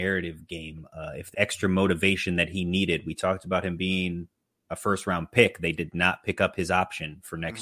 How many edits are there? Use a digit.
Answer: 1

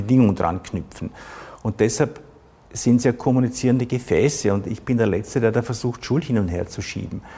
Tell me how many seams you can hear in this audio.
0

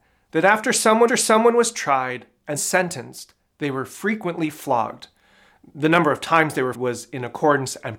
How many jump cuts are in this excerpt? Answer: 3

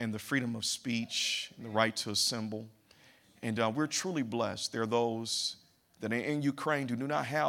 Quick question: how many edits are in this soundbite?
0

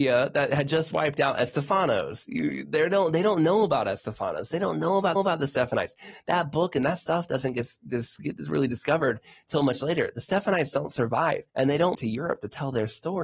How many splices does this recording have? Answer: 4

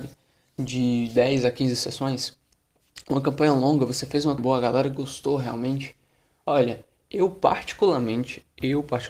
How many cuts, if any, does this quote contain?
1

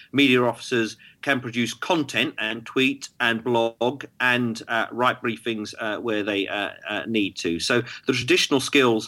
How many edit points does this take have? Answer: 0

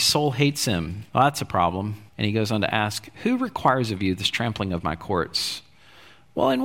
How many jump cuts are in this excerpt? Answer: 2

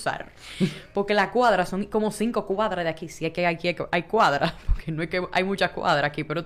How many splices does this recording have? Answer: 0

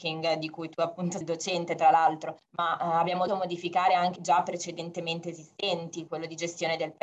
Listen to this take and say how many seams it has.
5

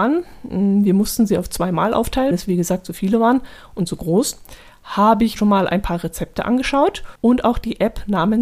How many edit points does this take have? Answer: 3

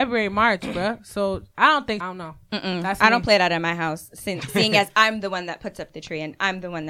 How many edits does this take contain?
1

